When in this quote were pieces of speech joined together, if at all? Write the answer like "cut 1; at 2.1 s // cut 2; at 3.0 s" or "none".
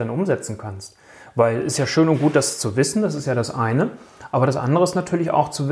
none